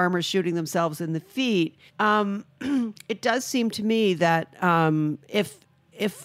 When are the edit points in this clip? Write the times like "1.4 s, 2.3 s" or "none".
1.9 s